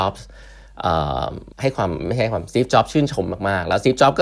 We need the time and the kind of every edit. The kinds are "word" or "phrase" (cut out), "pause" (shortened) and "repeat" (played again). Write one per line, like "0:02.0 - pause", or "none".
0:01.5 - pause